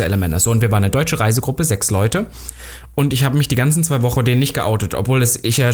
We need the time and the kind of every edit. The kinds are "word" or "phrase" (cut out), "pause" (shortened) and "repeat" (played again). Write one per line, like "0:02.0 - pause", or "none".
0:04.2 - word